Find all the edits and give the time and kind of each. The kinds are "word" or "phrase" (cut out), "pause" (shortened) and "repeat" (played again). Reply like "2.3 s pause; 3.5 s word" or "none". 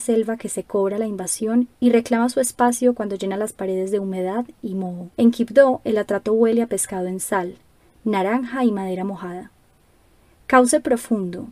1.7 s pause; 5.1 s pause